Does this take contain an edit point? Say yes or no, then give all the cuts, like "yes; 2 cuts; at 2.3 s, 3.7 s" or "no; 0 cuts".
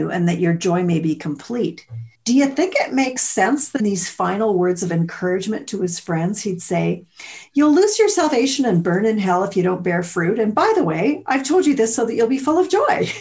yes; 2 cuts; at 2.1 s, 3.8 s